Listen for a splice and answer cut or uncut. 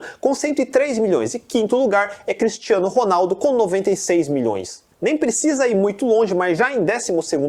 uncut